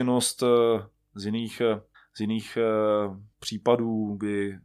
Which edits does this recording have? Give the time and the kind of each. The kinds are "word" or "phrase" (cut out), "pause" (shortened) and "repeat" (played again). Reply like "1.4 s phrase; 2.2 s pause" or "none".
1.9 s pause; 3.3 s pause

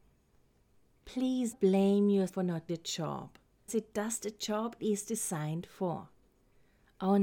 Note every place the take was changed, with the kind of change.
1.5 s word; 2.3 s word; 2.7 s word; 3.7 s word; 4.8 s word

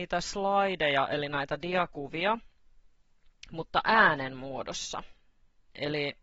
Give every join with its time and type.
none

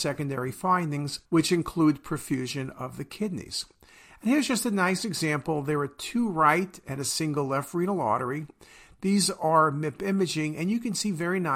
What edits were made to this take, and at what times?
1.3 s pause

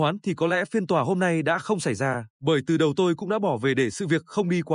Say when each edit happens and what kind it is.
2.3 s pause

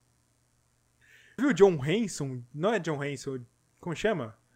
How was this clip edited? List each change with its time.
1.4 s word

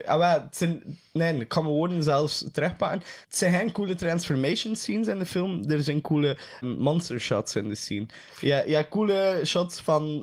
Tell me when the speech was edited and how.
3.2 s pause; 6.6 s word

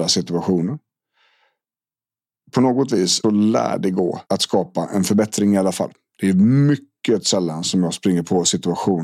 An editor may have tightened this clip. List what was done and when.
3.2 s word; 4.3 s pause

